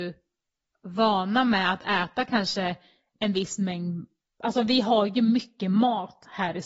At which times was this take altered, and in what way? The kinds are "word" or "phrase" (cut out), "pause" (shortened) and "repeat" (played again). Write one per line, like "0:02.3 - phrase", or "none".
none